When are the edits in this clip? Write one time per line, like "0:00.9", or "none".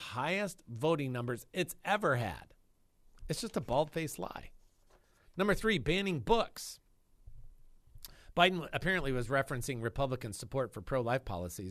none